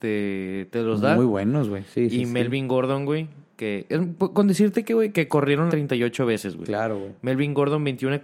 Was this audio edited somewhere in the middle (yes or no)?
yes